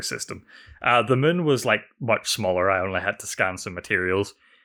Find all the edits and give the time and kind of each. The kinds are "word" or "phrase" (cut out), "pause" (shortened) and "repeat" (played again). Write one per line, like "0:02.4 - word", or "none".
none